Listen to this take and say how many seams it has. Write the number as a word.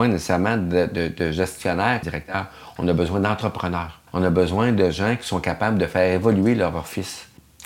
two